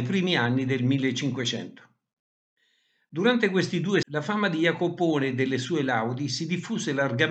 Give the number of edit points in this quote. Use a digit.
1